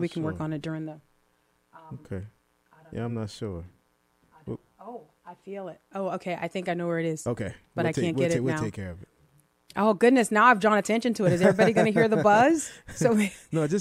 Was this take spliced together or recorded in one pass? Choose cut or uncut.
uncut